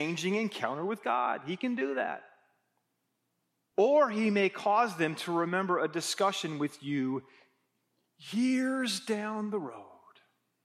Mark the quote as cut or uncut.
uncut